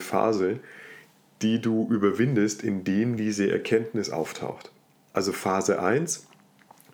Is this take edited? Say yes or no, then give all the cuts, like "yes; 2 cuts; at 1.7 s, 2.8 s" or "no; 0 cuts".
no; 0 cuts